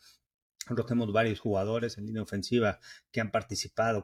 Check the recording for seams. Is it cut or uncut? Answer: uncut